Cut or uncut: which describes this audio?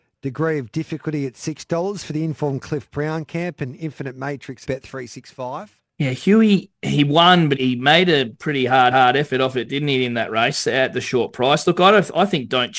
cut